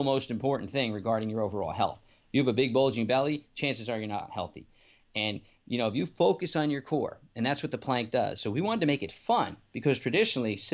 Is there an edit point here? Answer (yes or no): no